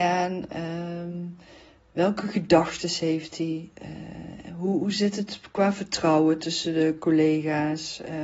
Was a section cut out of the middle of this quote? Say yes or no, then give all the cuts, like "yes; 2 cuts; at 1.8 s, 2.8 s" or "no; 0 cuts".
no; 0 cuts